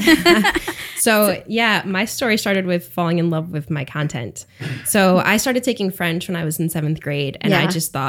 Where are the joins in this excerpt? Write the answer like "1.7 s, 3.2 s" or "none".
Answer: none